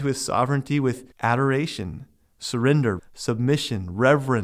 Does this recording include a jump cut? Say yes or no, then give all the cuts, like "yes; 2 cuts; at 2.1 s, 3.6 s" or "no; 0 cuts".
yes; 2 cuts; at 1.1 s, 3.0 s